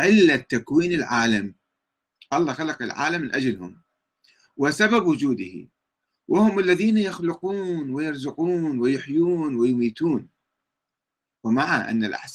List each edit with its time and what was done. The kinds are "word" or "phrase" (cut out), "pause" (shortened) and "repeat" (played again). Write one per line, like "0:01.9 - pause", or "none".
none

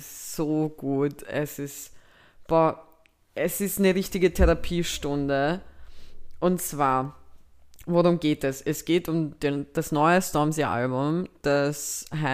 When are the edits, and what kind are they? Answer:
none

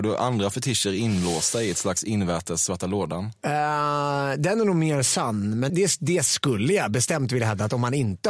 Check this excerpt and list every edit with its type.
0:05.7 - word

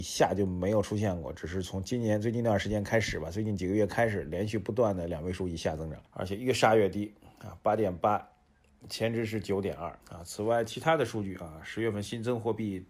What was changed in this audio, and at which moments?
0:06.1 - pause
0:10.0 - pause

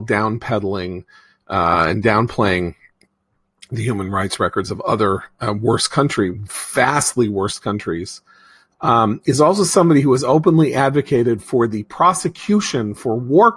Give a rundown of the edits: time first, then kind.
none

